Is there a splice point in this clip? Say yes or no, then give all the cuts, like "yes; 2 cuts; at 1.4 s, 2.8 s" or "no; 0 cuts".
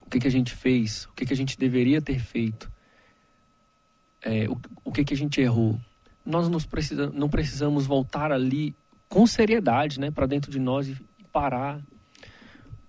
no; 0 cuts